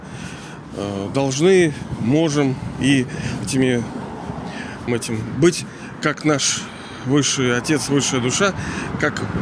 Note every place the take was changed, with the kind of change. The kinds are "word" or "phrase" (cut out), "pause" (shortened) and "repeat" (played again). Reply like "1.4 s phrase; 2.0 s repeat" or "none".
3.4 s word; 4.9 s word